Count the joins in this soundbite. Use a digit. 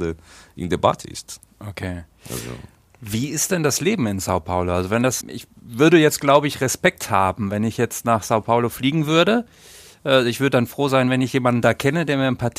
1